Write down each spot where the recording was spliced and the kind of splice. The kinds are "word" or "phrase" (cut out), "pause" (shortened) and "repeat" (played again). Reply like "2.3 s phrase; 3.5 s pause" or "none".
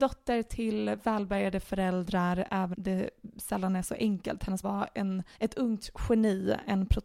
2.7 s word; 4.6 s word; 5.3 s pause